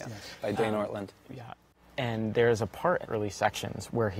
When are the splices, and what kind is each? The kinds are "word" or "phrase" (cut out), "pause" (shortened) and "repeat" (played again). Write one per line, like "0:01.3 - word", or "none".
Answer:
0:03.0 - word